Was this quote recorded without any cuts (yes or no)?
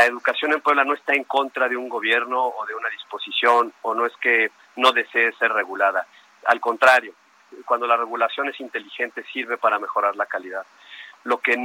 yes